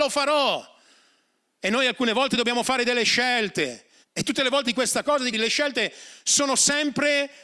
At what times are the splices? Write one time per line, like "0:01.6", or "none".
0:04.0
0:04.7
0:05.3